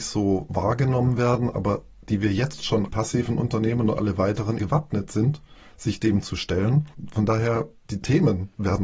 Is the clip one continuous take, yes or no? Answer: no